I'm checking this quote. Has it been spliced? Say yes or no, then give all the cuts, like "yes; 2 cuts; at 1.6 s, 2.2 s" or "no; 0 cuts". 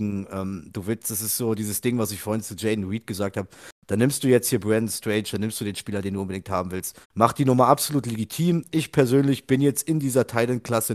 yes; 1 cut; at 7.0 s